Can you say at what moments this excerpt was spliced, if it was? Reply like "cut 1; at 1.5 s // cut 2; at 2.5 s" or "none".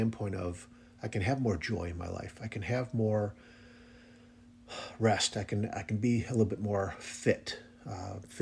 none